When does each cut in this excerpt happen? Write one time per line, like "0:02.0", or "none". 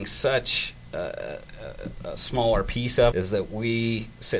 0:03.1